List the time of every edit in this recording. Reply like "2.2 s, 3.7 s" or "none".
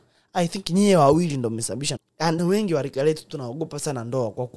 2.0 s, 2.4 s